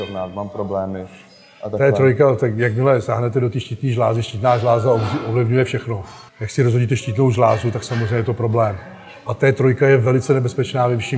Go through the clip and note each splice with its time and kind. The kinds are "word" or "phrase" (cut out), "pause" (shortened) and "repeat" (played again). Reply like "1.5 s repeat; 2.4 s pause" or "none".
6.3 s pause